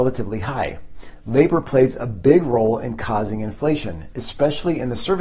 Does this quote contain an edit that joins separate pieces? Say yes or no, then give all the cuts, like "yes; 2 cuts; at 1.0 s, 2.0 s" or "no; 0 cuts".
no; 0 cuts